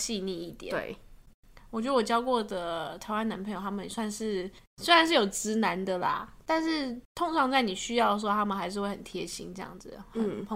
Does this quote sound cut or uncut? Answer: cut